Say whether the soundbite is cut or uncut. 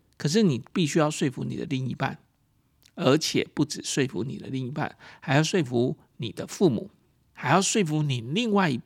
uncut